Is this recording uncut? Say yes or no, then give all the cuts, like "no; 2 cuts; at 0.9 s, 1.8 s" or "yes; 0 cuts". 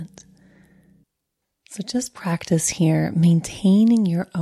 no; 1 cut; at 1.0 s